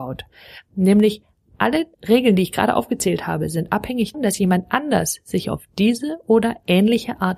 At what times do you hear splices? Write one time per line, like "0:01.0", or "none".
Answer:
0:01.9
0:04.1